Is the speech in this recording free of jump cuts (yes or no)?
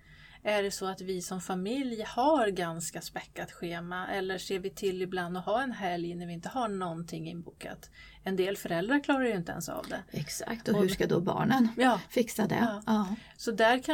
yes